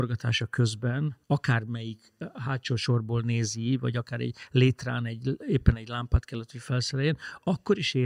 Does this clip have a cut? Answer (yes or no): yes